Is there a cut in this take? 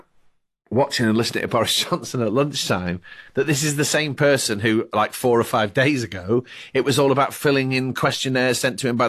no; 0 cuts

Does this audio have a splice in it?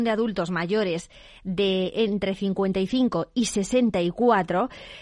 no; 0 cuts

